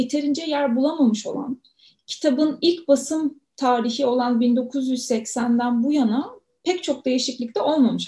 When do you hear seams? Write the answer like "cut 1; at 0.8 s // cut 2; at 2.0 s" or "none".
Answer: none

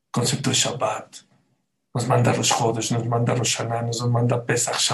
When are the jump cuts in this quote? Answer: none

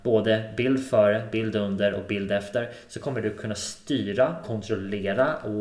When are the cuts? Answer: cut 1; at 4.4 s

